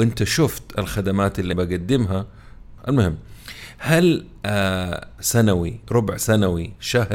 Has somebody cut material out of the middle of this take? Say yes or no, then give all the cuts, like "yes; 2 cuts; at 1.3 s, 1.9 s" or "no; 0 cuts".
yes; 3 cuts; at 1.5 s, 2.8 s, 5.2 s